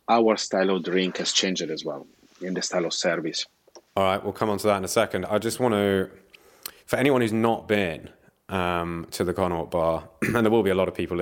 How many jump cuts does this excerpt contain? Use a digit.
2